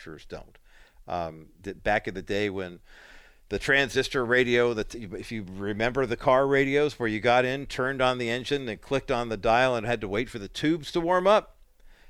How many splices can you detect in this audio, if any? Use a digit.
0